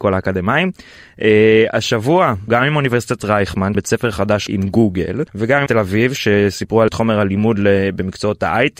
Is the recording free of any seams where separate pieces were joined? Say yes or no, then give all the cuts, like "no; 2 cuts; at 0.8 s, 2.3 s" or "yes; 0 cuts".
no; 6 cuts; at 2.5 s, 3.7 s, 4.5 s, 5.3 s, 5.7 s, 6.9 s